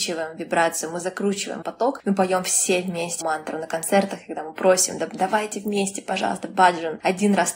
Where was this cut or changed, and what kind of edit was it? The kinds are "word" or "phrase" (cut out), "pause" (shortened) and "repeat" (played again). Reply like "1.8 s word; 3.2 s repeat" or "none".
1.6 s word; 3.2 s word